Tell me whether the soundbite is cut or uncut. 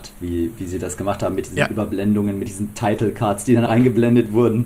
cut